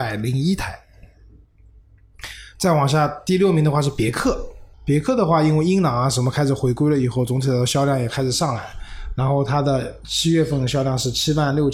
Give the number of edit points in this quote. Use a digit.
1